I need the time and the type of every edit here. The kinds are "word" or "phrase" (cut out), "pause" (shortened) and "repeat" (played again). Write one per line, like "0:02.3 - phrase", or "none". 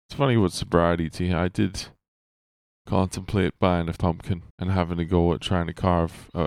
0:01.1 - word
0:04.0 - word
0:04.5 - pause